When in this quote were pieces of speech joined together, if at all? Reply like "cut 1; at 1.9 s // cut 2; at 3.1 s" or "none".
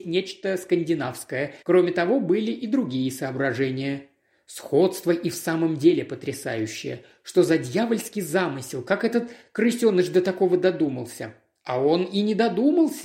cut 1; at 1.6 s